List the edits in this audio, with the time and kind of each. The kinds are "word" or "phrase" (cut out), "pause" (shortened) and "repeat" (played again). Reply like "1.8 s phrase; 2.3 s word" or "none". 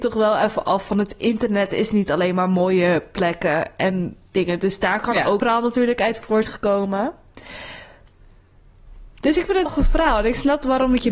5.4 s word; 6.4 s word; 9.7 s word